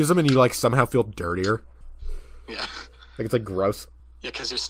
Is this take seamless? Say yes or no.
yes